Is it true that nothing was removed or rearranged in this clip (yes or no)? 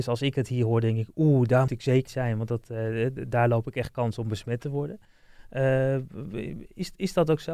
no